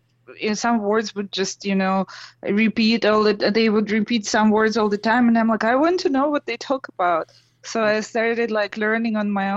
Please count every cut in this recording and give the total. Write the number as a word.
zero